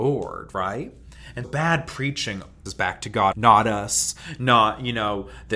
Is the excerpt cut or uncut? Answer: cut